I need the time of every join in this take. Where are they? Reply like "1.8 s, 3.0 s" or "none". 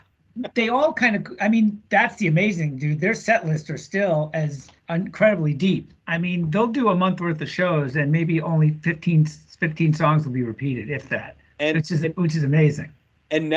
4.8 s, 11.5 s